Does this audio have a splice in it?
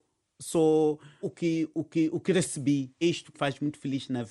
yes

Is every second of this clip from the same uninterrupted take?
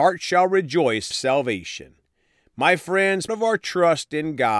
no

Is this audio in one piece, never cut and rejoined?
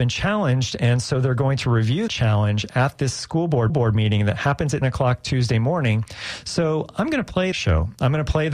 no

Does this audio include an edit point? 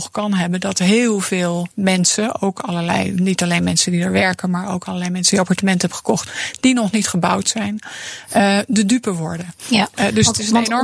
yes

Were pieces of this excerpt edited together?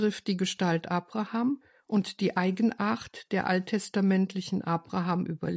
no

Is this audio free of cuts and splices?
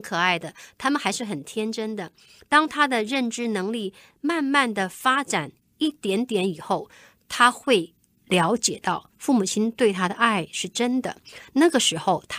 yes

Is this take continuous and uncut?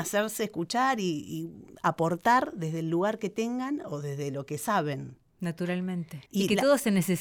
no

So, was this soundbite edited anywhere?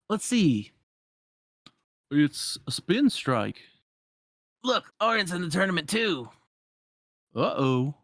yes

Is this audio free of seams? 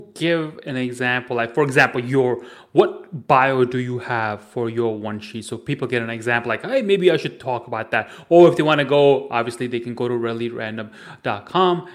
yes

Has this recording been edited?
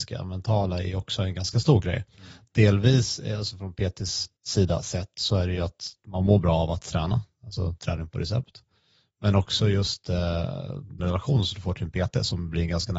yes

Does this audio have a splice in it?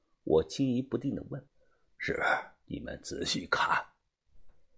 yes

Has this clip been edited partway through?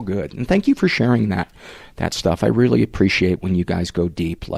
no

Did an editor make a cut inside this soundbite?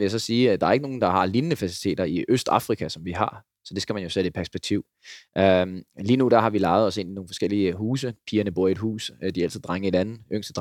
no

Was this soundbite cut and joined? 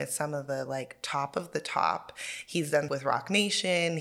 yes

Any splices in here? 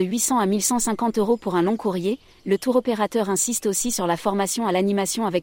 no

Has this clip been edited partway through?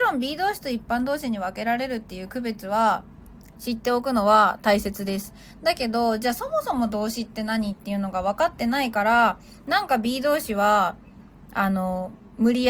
no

